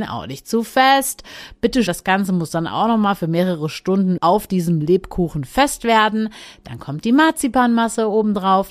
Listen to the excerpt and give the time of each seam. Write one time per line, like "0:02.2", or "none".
0:01.9
0:04.2